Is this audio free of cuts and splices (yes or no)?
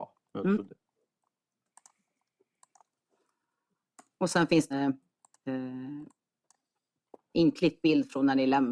no